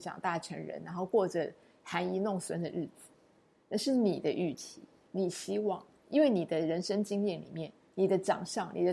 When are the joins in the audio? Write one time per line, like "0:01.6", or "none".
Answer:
none